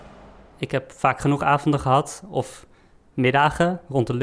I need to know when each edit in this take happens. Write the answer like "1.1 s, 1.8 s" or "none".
none